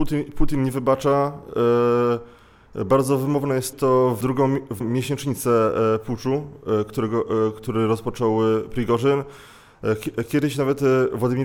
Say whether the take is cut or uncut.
cut